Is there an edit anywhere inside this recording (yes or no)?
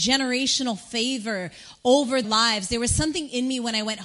yes